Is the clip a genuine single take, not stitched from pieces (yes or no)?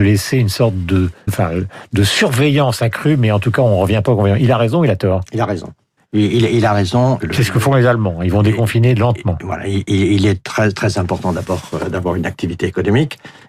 no